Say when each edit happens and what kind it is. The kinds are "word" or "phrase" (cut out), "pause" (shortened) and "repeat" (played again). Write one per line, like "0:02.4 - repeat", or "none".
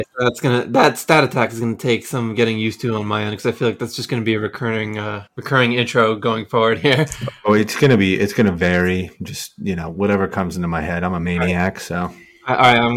0:05.3 - pause